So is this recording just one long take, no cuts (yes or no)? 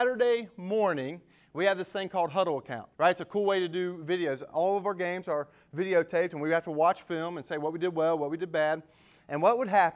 no